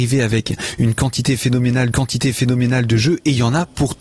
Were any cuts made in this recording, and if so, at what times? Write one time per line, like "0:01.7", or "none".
0:01.9